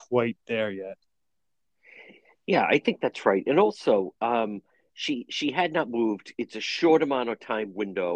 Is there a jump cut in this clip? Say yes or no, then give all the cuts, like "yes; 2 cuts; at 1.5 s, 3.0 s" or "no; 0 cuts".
no; 0 cuts